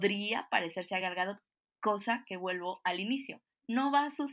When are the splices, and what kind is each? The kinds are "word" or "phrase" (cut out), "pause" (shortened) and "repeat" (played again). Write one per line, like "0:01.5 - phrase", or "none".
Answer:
none